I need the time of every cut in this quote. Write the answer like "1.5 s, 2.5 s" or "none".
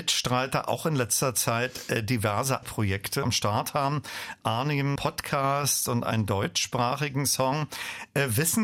2.6 s, 3.2 s, 5.0 s